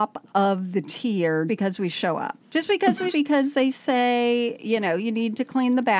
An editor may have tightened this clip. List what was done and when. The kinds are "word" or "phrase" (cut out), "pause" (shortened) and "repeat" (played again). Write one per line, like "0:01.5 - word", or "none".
0:01.5 - word
0:02.4 - pause
0:03.1 - phrase